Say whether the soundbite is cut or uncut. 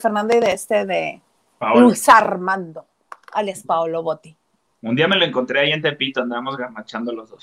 uncut